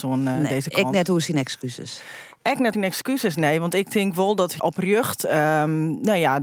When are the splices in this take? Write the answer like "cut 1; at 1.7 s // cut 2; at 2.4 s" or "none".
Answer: cut 1; at 2.7 s // cut 2; at 4.6 s